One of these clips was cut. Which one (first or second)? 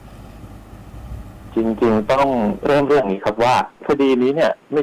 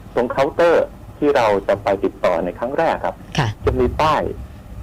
first